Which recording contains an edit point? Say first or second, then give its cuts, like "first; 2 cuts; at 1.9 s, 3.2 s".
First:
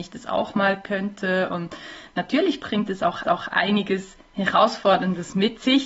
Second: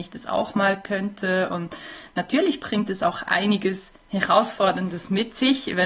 first; 1 cut; at 3.2 s